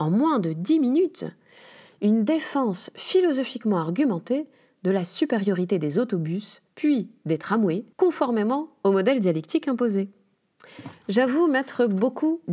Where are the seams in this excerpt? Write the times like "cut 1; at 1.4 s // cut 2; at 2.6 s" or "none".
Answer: cut 1; at 7.9 s